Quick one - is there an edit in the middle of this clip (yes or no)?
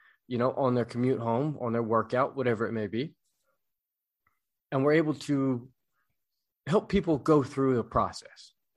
no